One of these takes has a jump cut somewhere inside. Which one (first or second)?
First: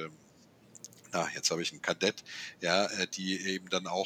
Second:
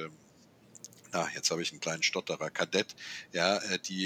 first